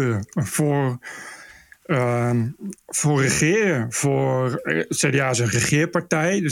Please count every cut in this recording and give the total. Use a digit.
0